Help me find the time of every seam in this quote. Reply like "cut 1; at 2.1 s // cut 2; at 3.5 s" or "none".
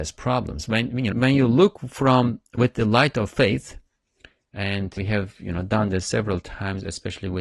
cut 1; at 1.1 s // cut 2; at 5.0 s